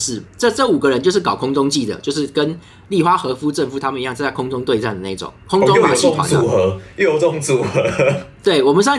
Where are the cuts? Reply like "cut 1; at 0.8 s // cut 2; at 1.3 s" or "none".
none